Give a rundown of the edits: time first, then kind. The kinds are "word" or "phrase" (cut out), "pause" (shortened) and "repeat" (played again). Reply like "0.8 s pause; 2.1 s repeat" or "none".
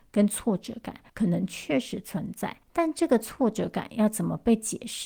1.1 s pause; 2.6 s pause